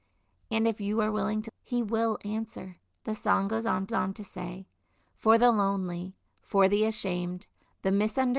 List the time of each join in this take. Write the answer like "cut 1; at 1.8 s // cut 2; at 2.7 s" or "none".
cut 1; at 1.5 s // cut 2; at 2.9 s // cut 3; at 3.9 s